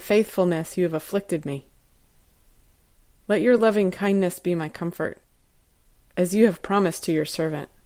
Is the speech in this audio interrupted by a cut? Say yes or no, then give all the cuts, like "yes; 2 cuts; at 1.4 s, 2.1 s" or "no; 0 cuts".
no; 0 cuts